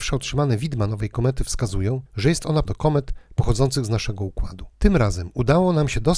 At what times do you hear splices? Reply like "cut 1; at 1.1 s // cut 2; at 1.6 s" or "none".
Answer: cut 1; at 2.1 s // cut 2; at 2.6 s // cut 3; at 4.7 s